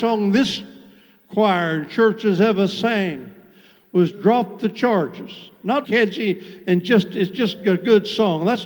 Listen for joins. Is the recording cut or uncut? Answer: cut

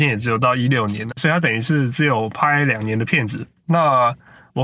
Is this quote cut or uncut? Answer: cut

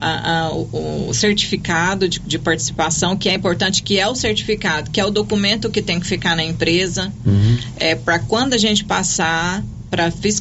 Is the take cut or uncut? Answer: uncut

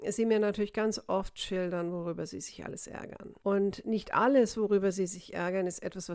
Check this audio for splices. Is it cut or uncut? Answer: cut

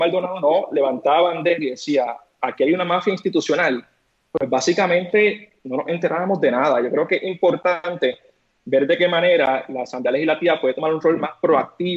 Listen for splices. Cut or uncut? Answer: uncut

